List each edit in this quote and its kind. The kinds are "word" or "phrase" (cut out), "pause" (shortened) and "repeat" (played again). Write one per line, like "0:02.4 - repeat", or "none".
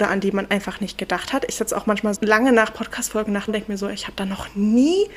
0:02.1 - word
0:03.5 - word

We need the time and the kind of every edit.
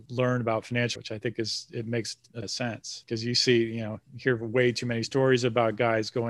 0:01.0 - word
0:02.4 - word

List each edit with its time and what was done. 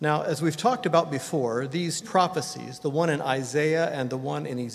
0:02.0 - word

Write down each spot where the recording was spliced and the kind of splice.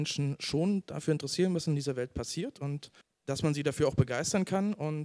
0:03.0 - pause

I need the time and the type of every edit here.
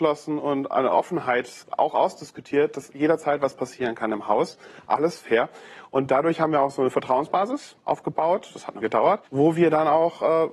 0:01.6 - word
0:07.8 - pause
0:08.8 - word
0:09.3 - pause

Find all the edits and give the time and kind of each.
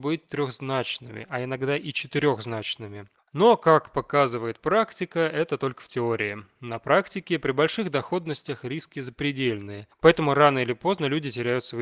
none

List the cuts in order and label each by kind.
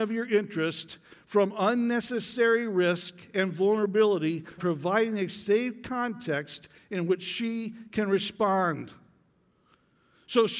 0:04.6 - word

